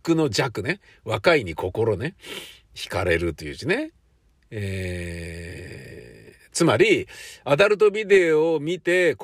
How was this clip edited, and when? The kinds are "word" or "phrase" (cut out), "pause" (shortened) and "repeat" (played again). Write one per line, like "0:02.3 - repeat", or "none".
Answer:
none